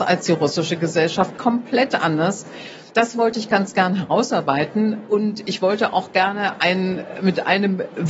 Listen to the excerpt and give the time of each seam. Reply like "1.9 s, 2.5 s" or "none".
2.9 s